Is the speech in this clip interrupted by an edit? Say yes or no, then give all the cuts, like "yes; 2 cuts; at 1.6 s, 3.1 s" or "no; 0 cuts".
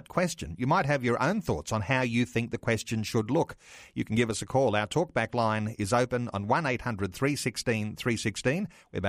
no; 0 cuts